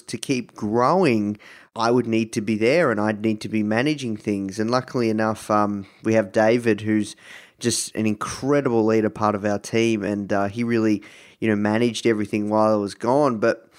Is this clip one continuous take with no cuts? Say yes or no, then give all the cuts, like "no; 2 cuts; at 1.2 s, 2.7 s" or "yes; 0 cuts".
yes; 0 cuts